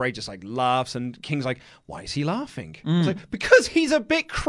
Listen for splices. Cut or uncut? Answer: uncut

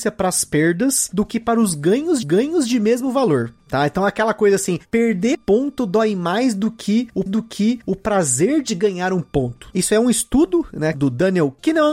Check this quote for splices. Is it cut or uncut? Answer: cut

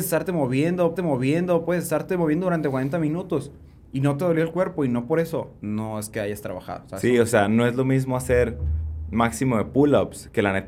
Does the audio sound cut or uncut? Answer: cut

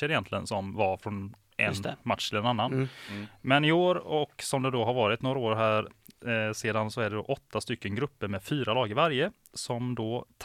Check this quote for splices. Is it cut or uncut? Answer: uncut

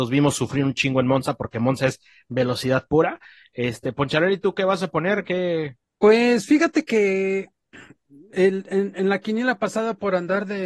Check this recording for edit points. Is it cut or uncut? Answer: uncut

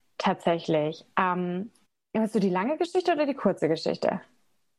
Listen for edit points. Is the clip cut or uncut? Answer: cut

